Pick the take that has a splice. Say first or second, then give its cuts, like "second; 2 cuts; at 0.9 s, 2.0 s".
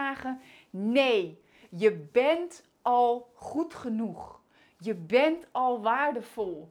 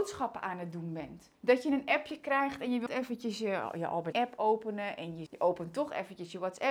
second; 4 cuts; at 1.4 s, 2.9 s, 4.1 s, 5.3 s